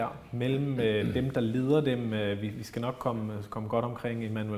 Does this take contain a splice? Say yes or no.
no